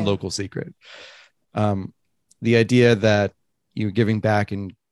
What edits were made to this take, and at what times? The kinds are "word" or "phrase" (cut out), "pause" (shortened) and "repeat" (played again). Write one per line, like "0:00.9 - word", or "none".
none